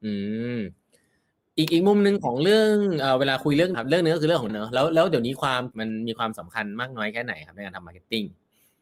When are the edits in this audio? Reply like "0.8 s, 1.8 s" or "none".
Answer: 3.7 s, 4.5 s, 5.7 s

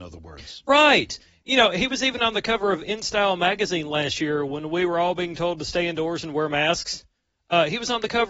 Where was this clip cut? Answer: none

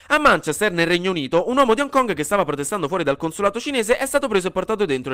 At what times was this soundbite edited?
none

